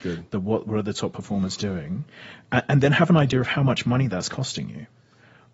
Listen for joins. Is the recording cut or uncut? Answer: uncut